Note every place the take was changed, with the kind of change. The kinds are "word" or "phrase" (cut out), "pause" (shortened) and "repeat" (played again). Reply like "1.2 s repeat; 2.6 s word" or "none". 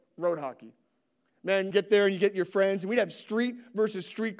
1.7 s word